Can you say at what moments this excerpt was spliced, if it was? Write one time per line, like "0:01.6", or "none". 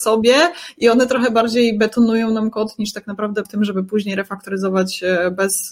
0:03.4